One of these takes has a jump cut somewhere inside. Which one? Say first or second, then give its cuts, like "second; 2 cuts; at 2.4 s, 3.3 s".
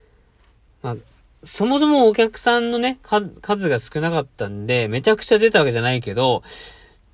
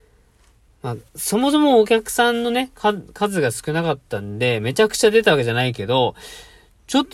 second; 1 cut; at 1.1 s